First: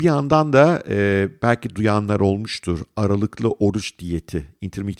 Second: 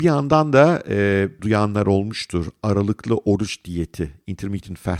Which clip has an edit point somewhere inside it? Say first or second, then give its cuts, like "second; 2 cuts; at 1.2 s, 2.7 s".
second; 1 cut; at 1.4 s